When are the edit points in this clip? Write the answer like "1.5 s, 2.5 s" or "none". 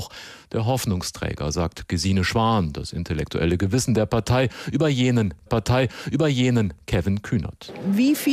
5.5 s